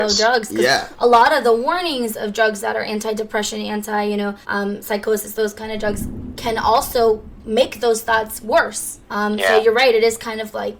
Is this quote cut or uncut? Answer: cut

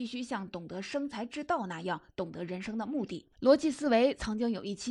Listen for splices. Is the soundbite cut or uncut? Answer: cut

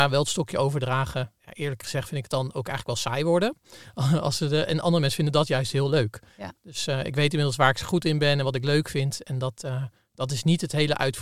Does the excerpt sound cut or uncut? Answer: uncut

